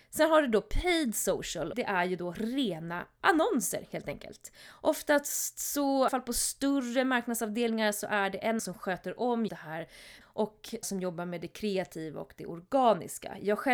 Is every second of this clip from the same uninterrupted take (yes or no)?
no